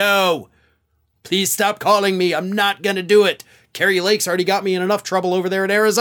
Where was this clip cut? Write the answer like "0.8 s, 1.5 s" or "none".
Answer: none